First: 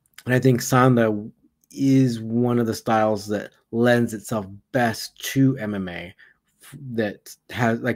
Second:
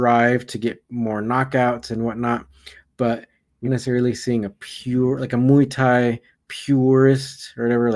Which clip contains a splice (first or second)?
second